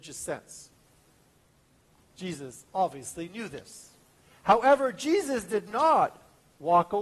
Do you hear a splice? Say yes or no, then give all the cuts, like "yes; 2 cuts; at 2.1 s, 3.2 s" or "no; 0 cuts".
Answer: no; 0 cuts